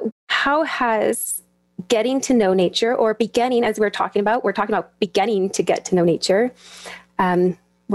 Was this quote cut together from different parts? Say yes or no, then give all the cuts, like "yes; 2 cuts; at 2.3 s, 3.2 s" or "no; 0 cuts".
no; 0 cuts